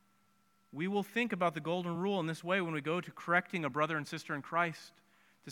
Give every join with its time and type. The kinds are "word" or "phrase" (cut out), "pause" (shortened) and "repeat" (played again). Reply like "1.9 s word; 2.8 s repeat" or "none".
none

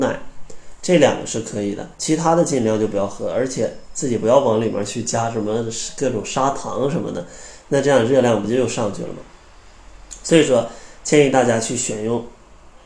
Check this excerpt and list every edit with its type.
1.9 s pause

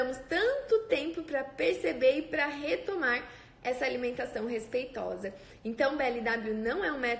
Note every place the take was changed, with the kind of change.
none

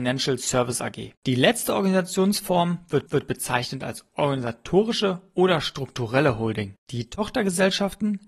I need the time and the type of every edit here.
1.2 s pause; 3.1 s repeat; 6.8 s pause

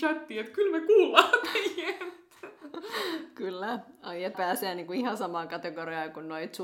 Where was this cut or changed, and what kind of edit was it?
4.3 s word

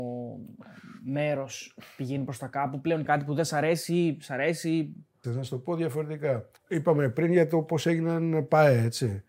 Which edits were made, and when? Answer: 3.0 s phrase; 5.2 s word; 6.6 s pause

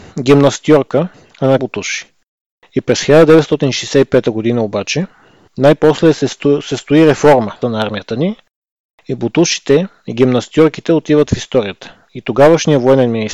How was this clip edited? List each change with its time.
1.1 s pause; 1.6 s word; 7.6 s word

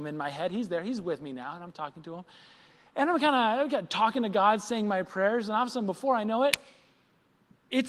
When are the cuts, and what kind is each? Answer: none

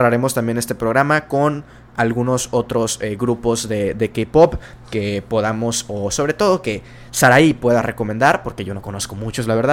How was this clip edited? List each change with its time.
none

